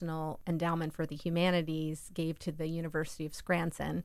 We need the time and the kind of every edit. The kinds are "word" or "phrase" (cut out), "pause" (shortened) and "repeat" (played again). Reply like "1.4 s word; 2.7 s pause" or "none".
none